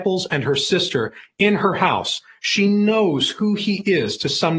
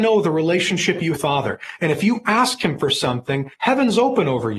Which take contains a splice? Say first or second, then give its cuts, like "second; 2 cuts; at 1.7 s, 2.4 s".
second; 2 cuts; at 1.1 s, 3.5 s